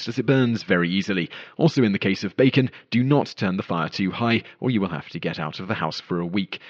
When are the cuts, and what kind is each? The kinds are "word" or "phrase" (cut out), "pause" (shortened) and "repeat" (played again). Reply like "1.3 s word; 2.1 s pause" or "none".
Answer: none